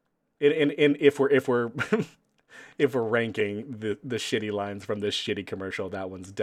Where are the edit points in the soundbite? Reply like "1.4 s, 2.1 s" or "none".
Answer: none